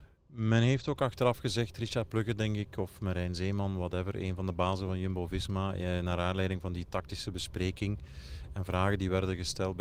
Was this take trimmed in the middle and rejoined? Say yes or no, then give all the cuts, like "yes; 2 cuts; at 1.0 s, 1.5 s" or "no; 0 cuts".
no; 0 cuts